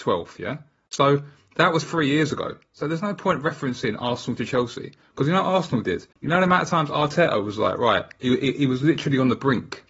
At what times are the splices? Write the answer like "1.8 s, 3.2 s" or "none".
6.1 s